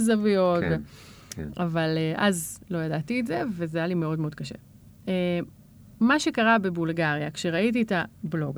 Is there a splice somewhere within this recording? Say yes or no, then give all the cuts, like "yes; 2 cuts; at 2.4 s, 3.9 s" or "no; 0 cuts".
no; 0 cuts